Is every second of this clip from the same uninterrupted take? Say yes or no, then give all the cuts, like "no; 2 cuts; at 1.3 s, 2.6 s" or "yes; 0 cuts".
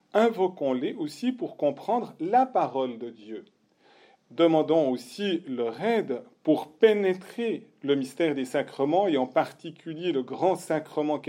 yes; 0 cuts